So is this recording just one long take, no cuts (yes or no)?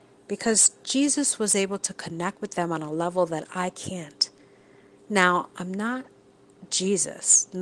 yes